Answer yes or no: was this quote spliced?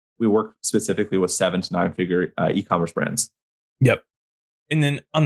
no